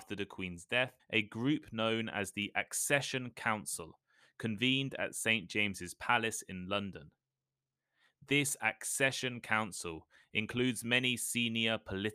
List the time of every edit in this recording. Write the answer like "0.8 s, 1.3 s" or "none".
1.0 s